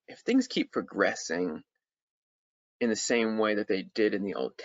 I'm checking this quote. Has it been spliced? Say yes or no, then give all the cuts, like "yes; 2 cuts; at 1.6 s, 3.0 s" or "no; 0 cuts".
no; 0 cuts